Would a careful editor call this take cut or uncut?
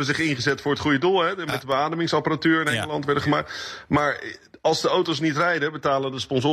uncut